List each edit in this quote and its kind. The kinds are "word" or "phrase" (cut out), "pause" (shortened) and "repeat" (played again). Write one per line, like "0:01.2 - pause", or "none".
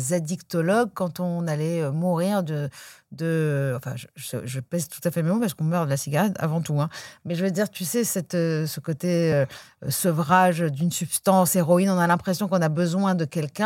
none